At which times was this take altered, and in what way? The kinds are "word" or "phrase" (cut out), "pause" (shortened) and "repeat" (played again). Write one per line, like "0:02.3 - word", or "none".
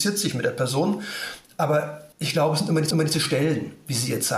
0:02.1 - pause
0:02.9 - repeat

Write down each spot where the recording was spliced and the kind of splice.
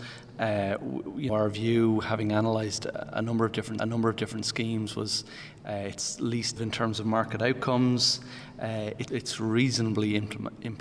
0:01.3 - word
0:03.8 - repeat
0:06.6 - word
0:09.1 - word

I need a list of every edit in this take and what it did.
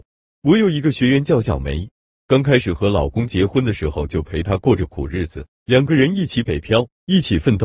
none

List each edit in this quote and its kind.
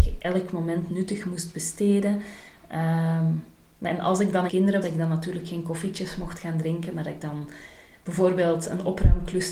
0:03.9 - word
0:04.5 - phrase
0:04.8 - word

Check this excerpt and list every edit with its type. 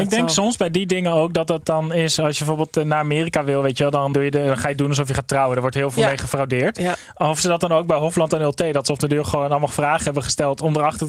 0:04.1 - word

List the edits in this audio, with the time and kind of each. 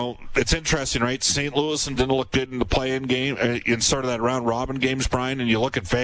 0:02.0 - word

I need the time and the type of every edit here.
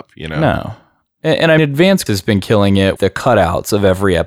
0:01.6 - word
0:02.1 - word
0:03.0 - word

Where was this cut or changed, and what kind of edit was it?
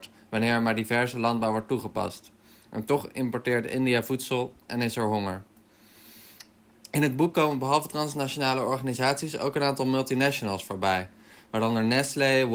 none

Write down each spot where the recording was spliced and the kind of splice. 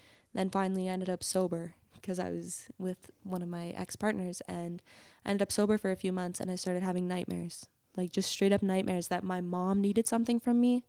none

